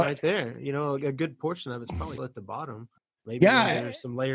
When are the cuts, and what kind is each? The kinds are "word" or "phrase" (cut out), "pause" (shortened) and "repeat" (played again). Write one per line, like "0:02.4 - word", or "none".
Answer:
0:02.2 - word
0:03.0 - pause